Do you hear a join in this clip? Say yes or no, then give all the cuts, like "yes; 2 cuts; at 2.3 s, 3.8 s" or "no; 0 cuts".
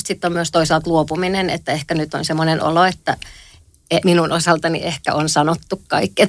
no; 0 cuts